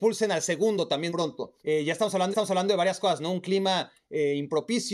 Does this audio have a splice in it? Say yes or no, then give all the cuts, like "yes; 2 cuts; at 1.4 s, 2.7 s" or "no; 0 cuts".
yes; 3 cuts; at 1.1 s, 1.6 s, 2.3 s